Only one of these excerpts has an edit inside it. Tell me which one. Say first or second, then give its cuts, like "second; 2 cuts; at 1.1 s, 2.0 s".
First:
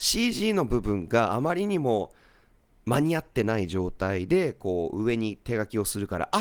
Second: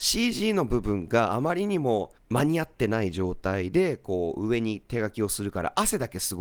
second; 1 cut; at 2.2 s